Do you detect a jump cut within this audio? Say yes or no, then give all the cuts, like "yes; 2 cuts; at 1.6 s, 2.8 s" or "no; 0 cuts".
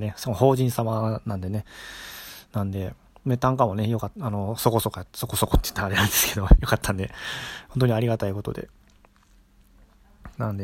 no; 0 cuts